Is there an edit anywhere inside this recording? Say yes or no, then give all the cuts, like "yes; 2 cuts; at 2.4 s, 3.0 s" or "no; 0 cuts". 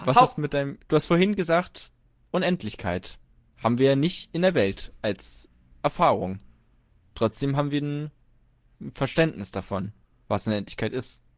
no; 0 cuts